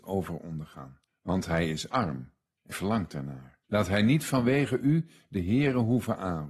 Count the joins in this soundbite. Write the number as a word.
three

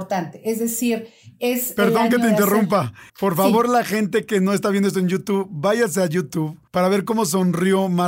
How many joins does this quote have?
two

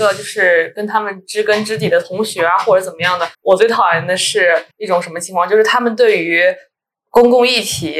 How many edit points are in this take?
two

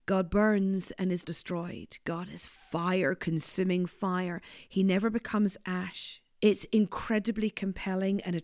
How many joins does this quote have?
two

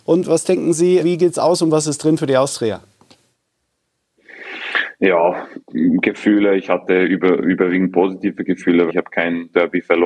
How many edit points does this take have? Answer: two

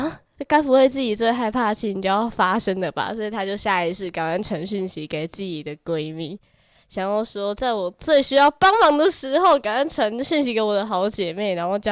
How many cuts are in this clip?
zero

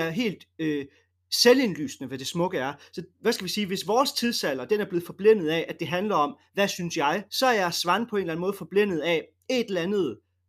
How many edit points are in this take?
one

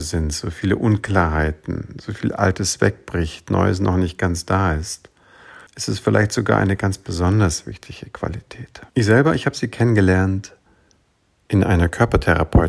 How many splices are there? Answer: two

